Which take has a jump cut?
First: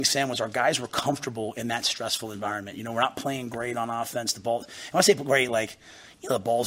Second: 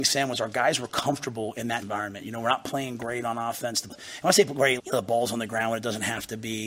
second; 3 cuts; at 1.8 s, 3.9 s, 4.8 s

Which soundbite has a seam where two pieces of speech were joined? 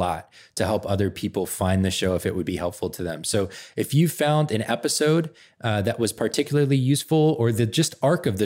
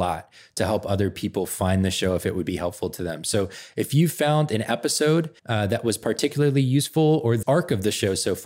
second; 2 cuts; at 5.4 s, 7.4 s

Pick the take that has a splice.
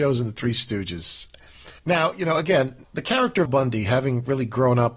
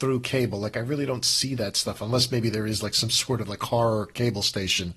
first; 3 cuts; at 1.8 s, 2.8 s, 3.5 s

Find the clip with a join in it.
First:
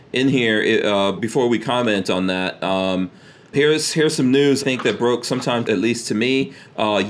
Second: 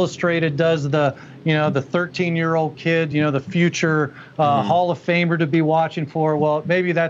first; 4 cuts; at 1.2 s, 3.5 s, 4.6 s, 5.6 s

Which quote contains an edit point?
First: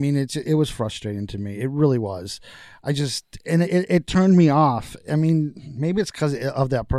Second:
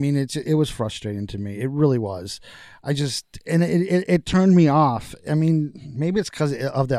first; 1 cut; at 3.6 s

